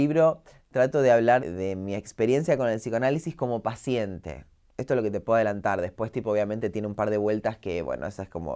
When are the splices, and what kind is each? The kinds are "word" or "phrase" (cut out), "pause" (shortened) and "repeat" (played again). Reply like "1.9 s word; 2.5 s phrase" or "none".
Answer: 1.4 s word